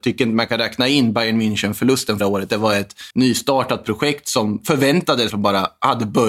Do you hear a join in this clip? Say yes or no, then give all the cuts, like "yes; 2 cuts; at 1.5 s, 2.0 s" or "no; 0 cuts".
yes; 3 cuts; at 2.2 s, 3.1 s, 5.3 s